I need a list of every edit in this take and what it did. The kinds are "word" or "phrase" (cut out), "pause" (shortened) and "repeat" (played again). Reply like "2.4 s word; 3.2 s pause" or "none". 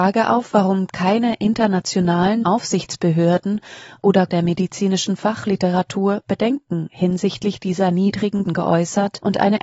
2.4 s word; 4.3 s word; 8.4 s word